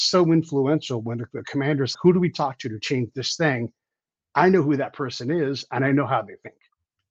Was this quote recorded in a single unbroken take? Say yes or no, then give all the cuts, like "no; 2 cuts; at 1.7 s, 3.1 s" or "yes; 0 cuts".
no; 1 cut; at 1.9 s